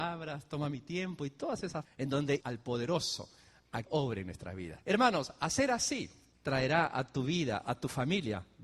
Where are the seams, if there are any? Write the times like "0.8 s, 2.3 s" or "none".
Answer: 1.8 s, 2.4 s, 3.8 s, 4.8 s, 6.3 s

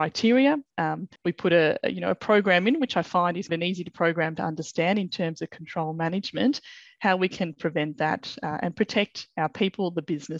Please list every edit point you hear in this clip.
1.2 s, 3.5 s

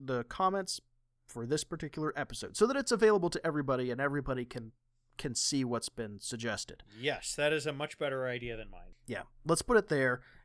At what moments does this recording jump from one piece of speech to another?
none

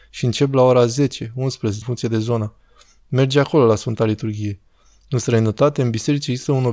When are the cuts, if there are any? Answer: 1.8 s

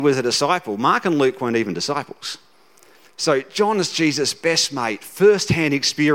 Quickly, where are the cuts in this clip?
none

